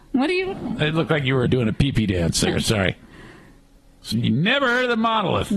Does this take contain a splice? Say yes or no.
yes